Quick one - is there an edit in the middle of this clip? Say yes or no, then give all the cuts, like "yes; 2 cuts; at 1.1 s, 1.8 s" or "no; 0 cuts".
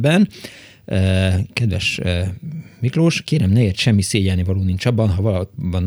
yes; 1 cut; at 3.8 s